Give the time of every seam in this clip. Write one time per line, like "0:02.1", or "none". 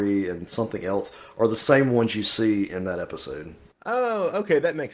none